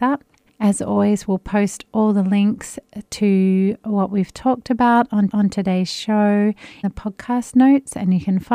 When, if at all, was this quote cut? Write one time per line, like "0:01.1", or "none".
0:05.3
0:06.8